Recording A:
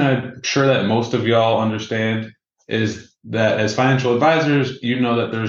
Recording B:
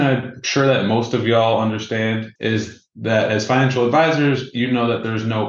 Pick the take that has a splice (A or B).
B